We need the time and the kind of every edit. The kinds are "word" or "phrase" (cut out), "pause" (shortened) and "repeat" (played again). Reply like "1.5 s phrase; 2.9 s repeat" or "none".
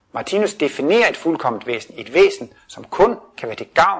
none

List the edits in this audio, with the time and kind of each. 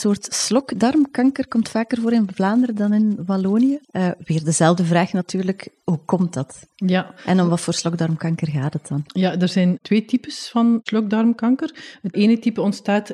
3.8 s pause; 9.1 s pause; 12.1 s word

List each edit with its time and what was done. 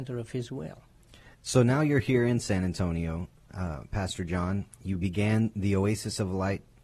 1.3 s pause

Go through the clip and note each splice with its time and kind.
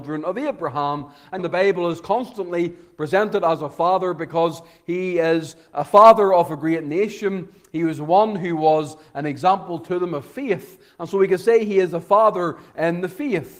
1.4 s word

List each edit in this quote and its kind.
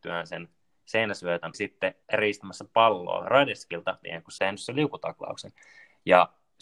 1.5 s word; 2.0 s pause; 4.0 s word; 4.4 s word

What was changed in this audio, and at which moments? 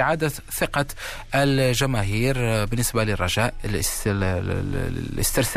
none

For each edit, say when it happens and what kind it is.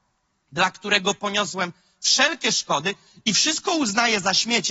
none

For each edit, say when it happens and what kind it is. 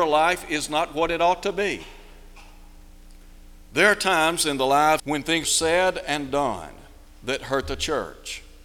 3.7 s pause; 5.0 s phrase; 5.4 s word; 7.1 s pause

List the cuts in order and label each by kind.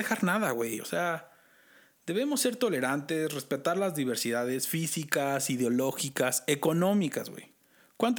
none

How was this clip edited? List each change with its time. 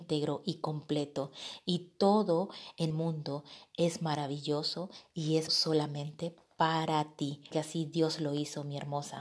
2.9 s word; 5.5 s word; 7.5 s word

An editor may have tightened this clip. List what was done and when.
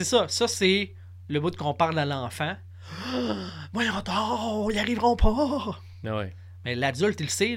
none

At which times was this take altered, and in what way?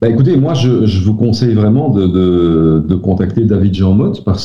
none

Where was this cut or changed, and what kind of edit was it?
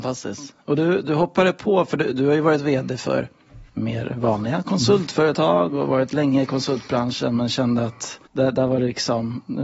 3.7 s pause; 8.3 s pause

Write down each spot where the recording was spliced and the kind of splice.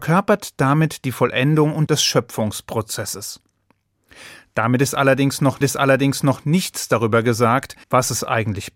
1.9 s phrase; 5.6 s repeat; 7.8 s pause

